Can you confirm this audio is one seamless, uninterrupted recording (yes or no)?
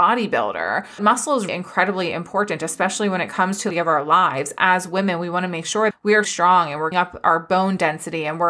no